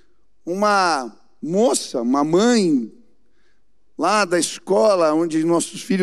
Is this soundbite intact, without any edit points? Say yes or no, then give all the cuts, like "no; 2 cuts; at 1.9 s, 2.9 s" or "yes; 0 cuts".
yes; 0 cuts